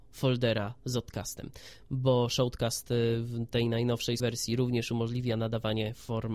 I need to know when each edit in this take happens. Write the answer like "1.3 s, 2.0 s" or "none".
4.2 s